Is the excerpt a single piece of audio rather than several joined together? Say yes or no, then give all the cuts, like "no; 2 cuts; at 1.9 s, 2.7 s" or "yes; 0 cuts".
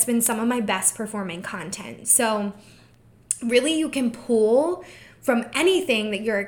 yes; 0 cuts